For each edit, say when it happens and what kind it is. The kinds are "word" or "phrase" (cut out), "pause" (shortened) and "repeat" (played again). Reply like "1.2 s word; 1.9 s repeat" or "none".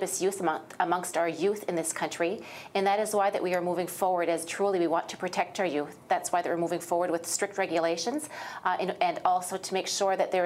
none